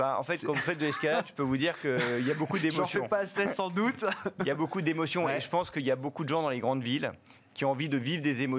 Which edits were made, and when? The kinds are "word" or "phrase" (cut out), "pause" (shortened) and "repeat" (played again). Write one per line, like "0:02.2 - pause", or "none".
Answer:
none